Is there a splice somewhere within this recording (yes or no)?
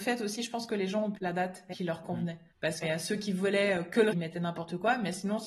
yes